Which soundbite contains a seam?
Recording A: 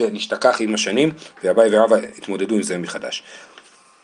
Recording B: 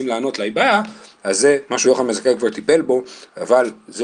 B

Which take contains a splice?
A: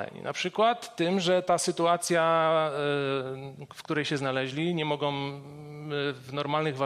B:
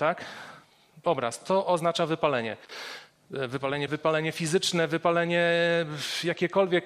B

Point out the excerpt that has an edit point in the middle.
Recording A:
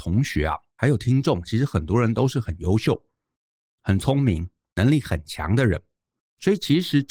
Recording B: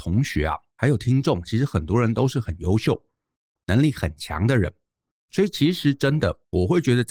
B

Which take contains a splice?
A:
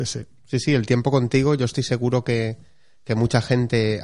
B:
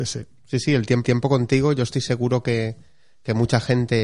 B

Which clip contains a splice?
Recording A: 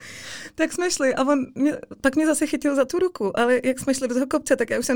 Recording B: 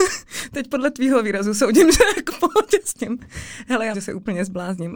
B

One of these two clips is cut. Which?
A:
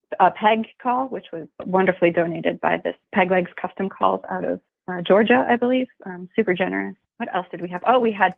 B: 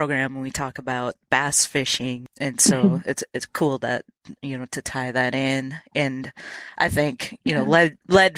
A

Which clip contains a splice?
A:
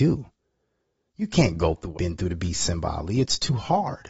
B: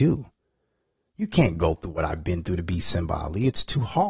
A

